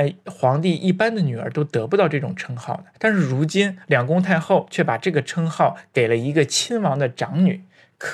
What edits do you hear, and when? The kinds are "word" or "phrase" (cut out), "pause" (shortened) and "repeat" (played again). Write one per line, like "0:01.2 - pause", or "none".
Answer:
0:02.9 - pause